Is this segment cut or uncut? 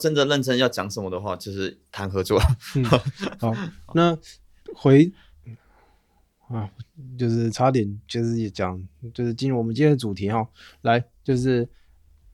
uncut